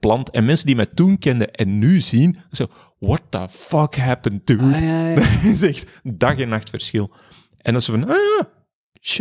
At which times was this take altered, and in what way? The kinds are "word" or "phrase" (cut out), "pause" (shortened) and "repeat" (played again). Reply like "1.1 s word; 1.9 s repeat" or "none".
none